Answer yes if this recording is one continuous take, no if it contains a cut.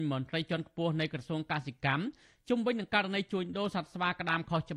yes